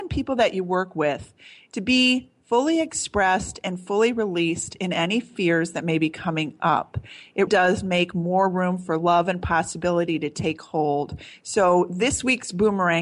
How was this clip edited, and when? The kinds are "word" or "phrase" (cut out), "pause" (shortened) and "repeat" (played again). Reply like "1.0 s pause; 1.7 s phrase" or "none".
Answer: 7.5 s word